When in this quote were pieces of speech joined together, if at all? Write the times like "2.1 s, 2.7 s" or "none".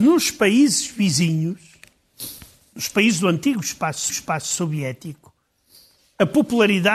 4.1 s